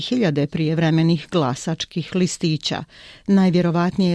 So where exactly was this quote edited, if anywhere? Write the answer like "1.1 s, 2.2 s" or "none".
none

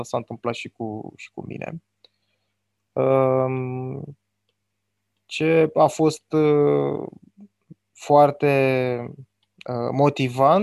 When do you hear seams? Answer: none

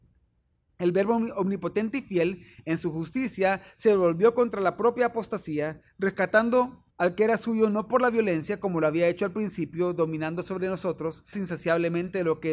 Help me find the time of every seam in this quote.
6.9 s, 11.3 s

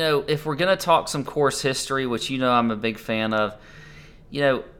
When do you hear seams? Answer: none

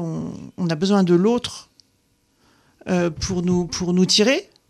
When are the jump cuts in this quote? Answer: none

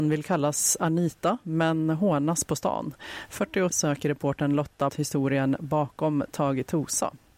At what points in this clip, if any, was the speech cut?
3.7 s, 4.9 s

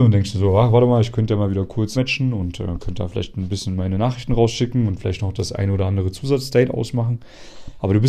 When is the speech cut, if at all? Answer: 1.9 s

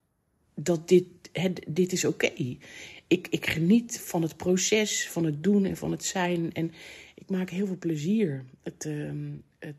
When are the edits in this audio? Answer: none

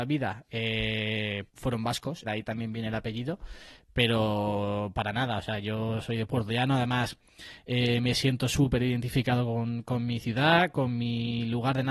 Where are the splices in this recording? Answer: 1.5 s, 2.2 s

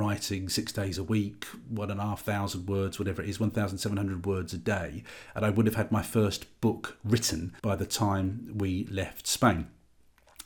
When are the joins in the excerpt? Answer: 7.6 s

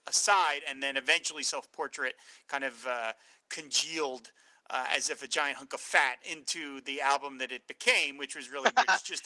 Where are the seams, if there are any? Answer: none

